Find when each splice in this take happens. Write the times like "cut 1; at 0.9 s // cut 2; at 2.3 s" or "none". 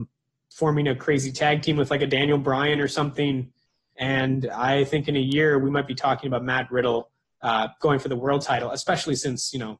none

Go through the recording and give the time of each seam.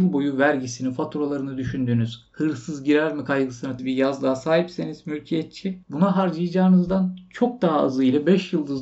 cut 1; at 3.8 s // cut 2; at 5.8 s

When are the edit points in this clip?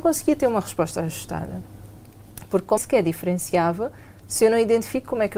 cut 1; at 2.8 s

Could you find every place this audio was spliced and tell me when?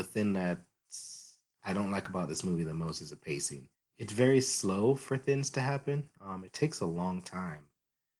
cut 1; at 3.7 s

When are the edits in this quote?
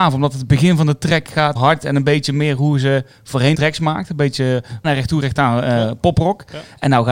cut 1; at 1.6 s // cut 2; at 3.5 s // cut 3; at 4.8 s

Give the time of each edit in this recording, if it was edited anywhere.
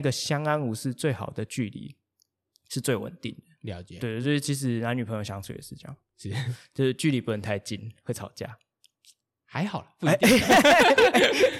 none

